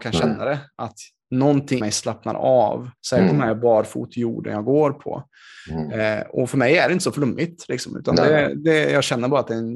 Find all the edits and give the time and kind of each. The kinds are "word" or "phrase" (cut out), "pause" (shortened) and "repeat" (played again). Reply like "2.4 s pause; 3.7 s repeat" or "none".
1.8 s word; 3.0 s pause; 4.1 s phrase